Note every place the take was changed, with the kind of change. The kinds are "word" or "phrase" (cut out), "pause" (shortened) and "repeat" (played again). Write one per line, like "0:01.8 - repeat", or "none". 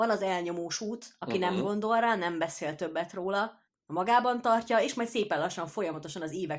none